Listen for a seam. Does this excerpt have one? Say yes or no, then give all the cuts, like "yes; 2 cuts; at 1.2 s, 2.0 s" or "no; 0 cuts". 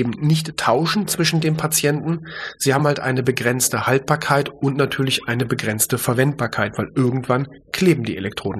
no; 0 cuts